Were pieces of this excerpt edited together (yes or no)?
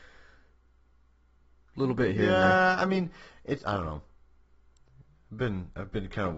yes